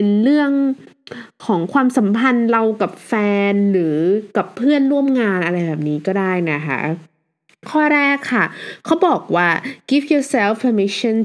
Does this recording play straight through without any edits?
yes; 0 cuts

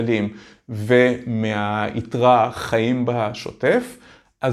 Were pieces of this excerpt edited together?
no; 0 cuts

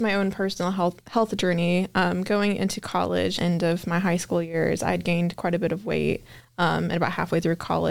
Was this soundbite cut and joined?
yes; 1 cut; at 3.4 s

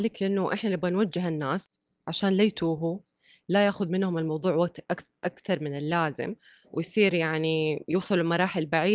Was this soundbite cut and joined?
no; 0 cuts

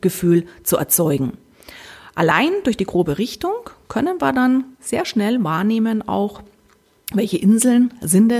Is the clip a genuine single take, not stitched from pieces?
yes; 0 cuts

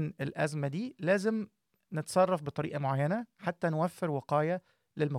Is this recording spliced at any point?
no; 0 cuts

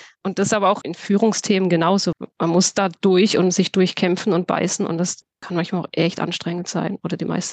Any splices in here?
no; 0 cuts

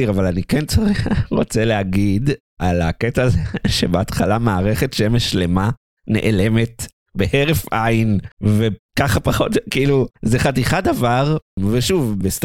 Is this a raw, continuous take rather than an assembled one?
yes; 0 cuts

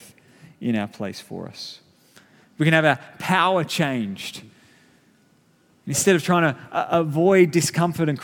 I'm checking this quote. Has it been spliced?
no; 0 cuts

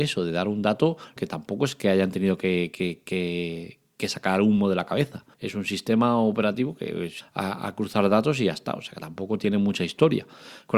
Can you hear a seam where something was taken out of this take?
yes; 3 cuts; at 1.2 s, 5.3 s, 7.2 s

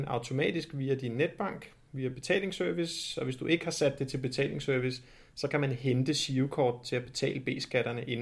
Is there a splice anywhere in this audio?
no; 0 cuts

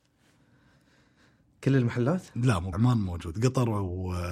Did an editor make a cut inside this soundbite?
yes; 1 cut; at 2.7 s

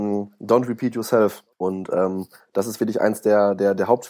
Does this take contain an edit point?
yes; 1 cut; at 1.5 s

